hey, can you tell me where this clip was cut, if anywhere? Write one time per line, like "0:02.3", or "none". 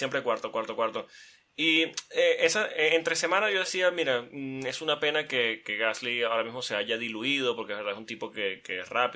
none